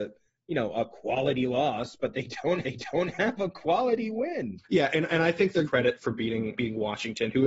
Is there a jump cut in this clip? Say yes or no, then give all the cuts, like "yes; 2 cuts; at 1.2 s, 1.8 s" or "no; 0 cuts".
yes; 4 cuts; at 2.6 s, 4.6 s, 5.6 s, 6.6 s